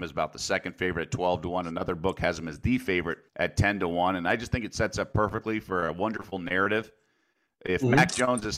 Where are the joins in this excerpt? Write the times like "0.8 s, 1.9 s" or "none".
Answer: 3.3 s

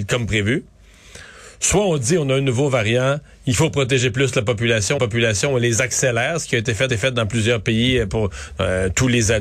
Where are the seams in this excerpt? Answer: 5.0 s, 6.9 s

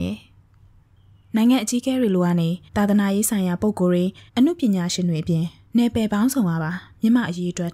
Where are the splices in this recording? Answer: 2.7 s, 4.3 s

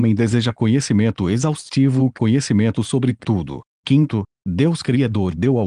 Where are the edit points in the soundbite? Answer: none

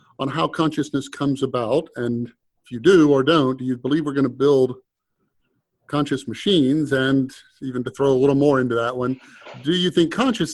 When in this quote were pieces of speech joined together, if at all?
none

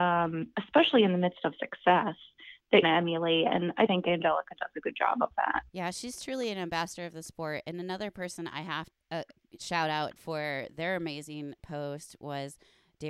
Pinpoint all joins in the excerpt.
2.8 s, 3.9 s, 5.7 s, 8.9 s, 10.2 s

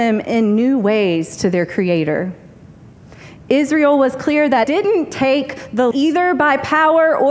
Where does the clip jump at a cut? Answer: 4.6 s, 5.9 s

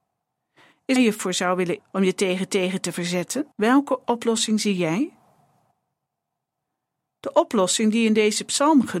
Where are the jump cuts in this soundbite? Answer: 1.0 s, 1.8 s, 2.5 s, 3.5 s

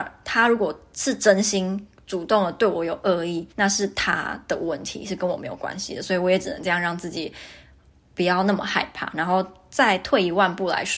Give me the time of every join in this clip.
3.5 s

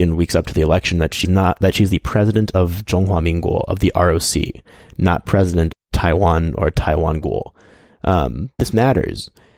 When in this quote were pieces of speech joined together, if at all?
1.2 s, 5.7 s, 8.6 s

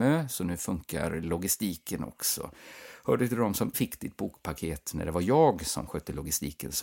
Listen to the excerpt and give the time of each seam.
3.7 s

